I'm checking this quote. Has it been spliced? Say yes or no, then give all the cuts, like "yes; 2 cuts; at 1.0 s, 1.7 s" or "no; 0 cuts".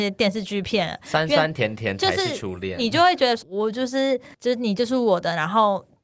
yes; 2 cuts; at 3.4 s, 4.3 s